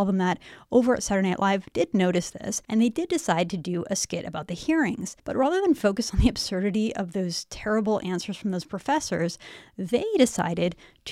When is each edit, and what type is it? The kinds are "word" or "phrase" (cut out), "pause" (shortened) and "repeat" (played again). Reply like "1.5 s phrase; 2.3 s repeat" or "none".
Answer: 2.6 s pause; 5.2 s pause